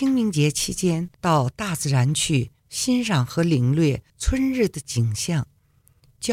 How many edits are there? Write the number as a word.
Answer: three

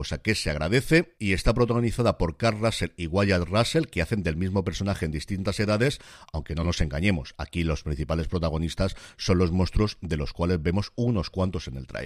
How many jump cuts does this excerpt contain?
zero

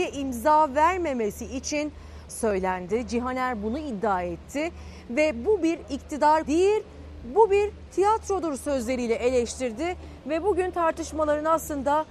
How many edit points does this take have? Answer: two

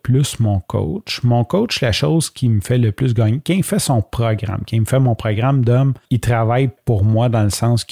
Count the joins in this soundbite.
one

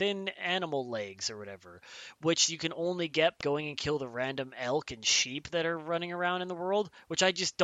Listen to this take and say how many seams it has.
one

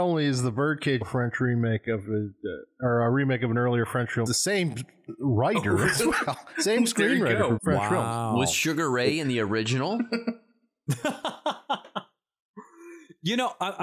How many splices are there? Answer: three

